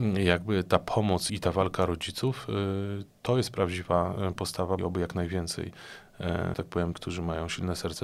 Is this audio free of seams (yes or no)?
no